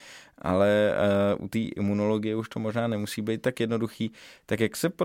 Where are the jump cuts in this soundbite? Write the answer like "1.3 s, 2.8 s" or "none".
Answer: none